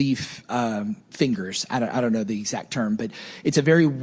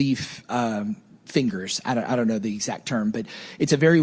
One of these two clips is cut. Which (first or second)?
first